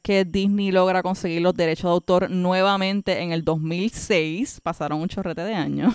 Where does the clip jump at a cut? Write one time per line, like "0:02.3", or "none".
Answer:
none